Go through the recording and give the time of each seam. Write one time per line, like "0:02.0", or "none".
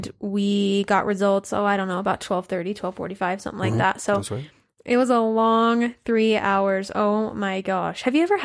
none